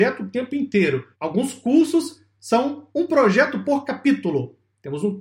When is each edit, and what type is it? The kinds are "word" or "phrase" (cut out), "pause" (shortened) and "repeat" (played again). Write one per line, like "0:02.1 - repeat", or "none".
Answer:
0:01.1 - pause
0:02.9 - pause